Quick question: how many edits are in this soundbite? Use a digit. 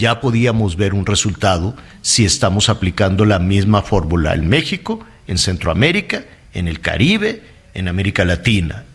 0